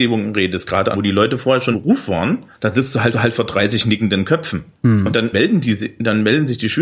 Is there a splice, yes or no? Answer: yes